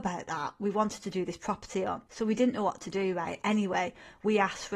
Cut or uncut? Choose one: cut